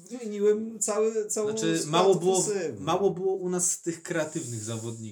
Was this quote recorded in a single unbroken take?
yes; 0 cuts

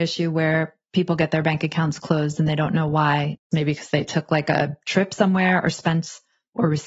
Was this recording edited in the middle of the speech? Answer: no; 0 cuts

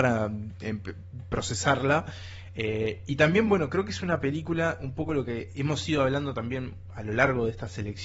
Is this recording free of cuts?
yes; 0 cuts

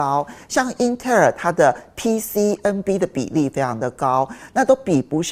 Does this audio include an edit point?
no; 0 cuts

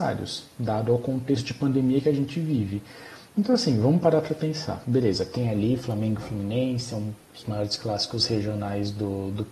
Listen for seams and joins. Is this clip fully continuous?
no; 1 cut; at 7.2 s

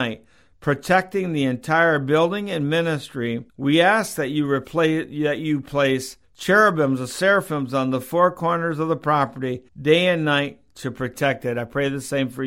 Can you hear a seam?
yes; 3 cuts; at 3.5 s, 6.2 s, 9.7 s

